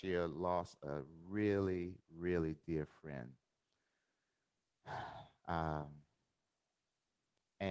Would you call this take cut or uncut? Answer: uncut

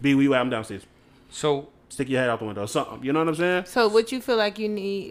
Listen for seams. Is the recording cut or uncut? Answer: uncut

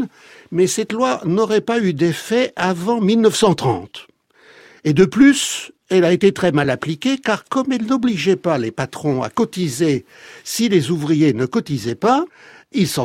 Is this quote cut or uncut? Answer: uncut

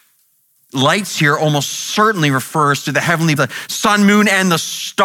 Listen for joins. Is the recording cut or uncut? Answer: cut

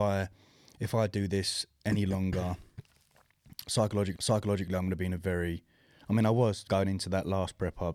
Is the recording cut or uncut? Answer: cut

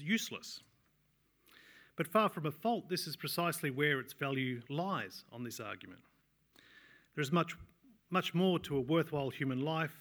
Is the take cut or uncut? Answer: uncut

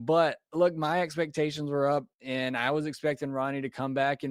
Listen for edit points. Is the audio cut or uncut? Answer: cut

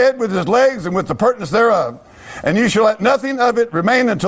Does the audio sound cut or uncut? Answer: uncut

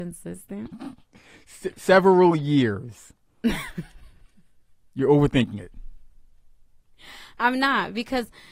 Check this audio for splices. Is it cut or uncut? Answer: uncut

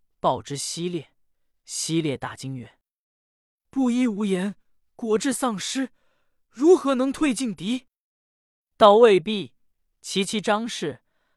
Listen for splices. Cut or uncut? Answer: uncut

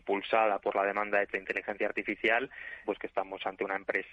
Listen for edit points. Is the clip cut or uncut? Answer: cut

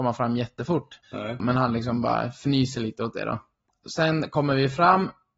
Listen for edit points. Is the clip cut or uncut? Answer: cut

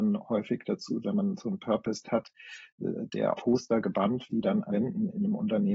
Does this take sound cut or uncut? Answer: cut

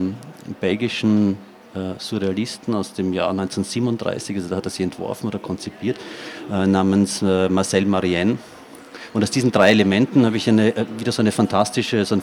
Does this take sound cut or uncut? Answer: uncut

